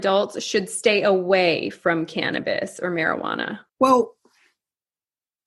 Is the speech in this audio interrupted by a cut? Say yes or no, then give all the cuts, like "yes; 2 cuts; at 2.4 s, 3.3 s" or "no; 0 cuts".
yes; 1 cut; at 3.7 s